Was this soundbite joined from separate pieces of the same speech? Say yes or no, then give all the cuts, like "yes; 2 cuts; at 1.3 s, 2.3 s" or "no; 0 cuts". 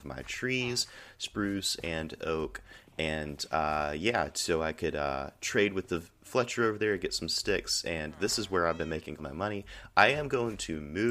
yes; 1 cut; at 9.2 s